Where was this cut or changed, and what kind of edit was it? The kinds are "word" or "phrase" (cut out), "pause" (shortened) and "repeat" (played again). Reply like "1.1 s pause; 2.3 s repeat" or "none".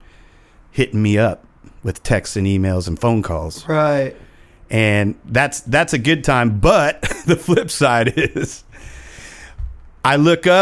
none